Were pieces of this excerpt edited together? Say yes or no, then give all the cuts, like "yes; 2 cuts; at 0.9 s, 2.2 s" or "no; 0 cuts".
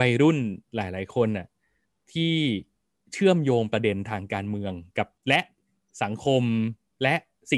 yes; 2 cuts; at 1.8 s, 5.2 s